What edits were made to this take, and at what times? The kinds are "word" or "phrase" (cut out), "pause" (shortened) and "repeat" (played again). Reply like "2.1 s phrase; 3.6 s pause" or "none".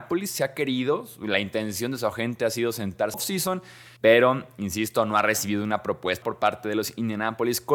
3.1 s phrase; 4.0 s pause; 6.2 s word